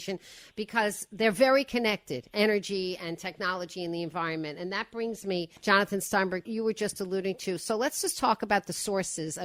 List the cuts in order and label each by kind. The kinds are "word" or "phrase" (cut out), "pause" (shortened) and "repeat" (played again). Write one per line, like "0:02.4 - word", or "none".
0:05.6 - pause
0:06.4 - phrase